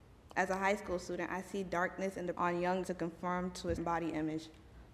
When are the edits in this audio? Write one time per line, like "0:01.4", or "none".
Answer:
0:02.3
0:02.8
0:03.8